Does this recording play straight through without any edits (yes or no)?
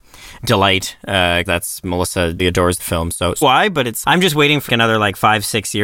no